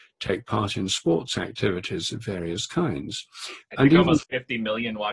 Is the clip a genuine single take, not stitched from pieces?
no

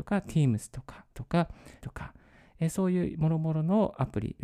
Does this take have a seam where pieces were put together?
yes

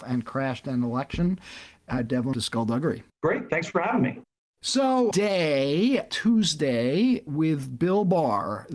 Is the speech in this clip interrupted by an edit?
yes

